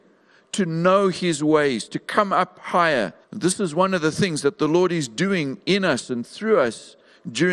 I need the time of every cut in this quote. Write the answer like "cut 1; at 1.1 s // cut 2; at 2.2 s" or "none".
cut 1; at 3.2 s